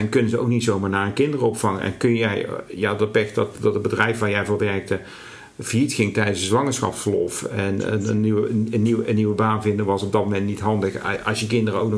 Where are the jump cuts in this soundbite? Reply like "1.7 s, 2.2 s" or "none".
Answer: none